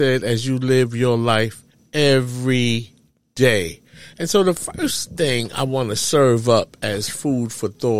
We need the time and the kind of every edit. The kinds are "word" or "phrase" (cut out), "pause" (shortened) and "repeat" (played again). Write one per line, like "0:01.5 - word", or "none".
0:01.7 - pause

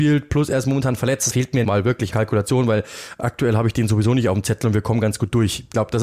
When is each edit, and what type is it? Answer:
0:01.3 - phrase
0:01.6 - word
0:02.1 - word

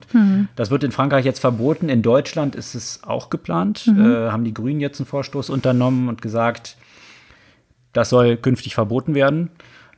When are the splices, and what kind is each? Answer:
none

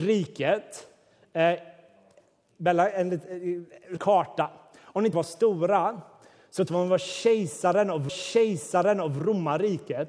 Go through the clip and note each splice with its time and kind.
0:04.0 - phrase
0:05.1 - phrase
0:06.7 - word
0:08.1 - repeat

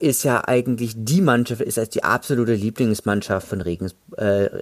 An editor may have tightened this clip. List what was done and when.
none

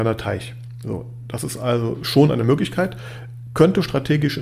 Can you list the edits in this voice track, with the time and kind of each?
none

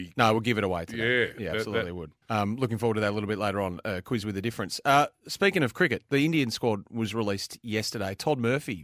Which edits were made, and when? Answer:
0:02.2 - pause

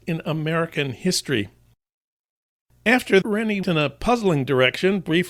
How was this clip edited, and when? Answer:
0:03.2 - word
0:03.6 - word

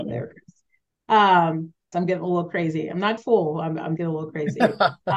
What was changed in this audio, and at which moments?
0:01.9 - word
0:03.2 - word
0:04.0 - word

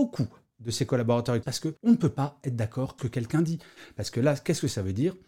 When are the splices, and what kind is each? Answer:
0:01.4 - word
0:01.8 - pause
0:03.0 - phrase

